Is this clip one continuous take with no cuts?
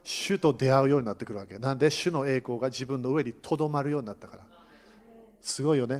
yes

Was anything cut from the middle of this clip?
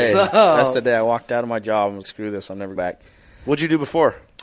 yes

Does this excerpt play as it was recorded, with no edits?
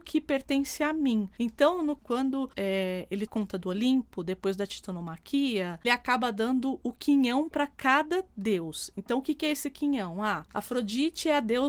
no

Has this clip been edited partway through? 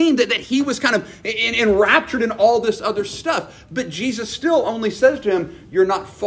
no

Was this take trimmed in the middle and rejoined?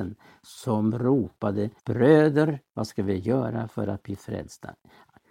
yes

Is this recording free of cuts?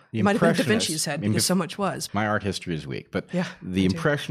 no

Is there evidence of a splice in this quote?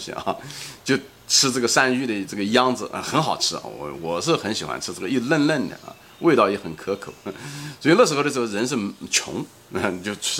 no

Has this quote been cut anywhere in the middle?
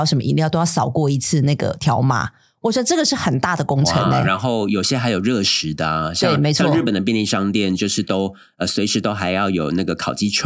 no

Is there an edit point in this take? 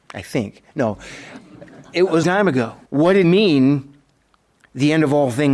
yes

